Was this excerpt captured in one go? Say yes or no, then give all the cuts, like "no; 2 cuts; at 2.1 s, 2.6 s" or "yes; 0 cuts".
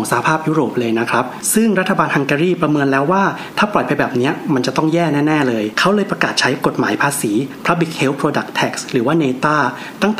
yes; 0 cuts